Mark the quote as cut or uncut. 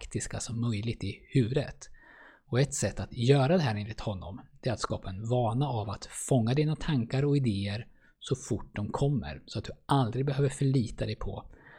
uncut